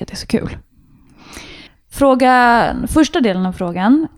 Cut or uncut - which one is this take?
cut